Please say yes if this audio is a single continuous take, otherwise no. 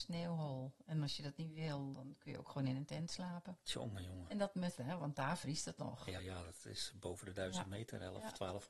no